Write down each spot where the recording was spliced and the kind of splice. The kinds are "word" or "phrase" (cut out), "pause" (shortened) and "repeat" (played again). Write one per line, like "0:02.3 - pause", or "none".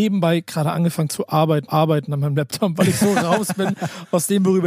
0:01.7 - repeat

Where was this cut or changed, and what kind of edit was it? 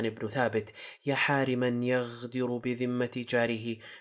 none

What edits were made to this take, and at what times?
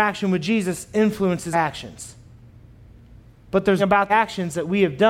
0:01.5 - word
0:03.8 - word
0:04.1 - word

